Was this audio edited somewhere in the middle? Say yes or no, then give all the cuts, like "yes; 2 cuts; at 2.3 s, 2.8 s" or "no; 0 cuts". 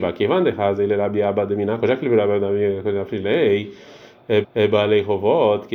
yes; 1 cut; at 4.4 s